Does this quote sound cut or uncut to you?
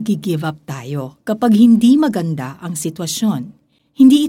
uncut